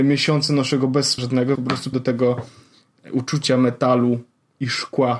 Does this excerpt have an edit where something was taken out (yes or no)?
yes